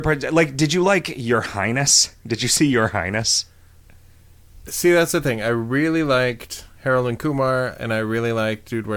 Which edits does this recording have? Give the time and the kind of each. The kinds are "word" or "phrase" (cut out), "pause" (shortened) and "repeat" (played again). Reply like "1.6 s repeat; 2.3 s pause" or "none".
none